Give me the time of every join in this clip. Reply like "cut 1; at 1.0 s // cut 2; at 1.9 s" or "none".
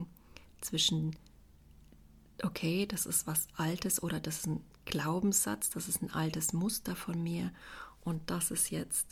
none